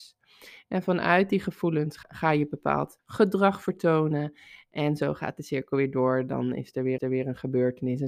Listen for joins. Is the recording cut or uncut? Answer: cut